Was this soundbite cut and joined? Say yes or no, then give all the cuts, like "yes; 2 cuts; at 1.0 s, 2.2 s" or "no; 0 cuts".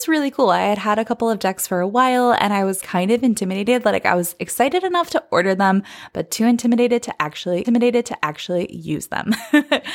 yes; 2 cuts; at 2.8 s, 7.6 s